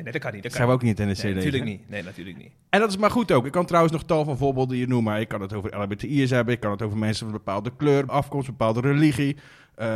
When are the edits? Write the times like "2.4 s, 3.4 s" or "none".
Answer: 8.1 s